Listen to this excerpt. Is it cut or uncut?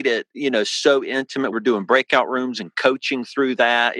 cut